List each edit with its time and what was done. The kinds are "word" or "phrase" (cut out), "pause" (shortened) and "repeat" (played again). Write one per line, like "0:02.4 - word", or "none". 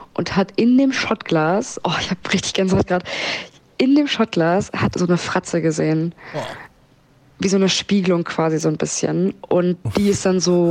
0:04.9 - word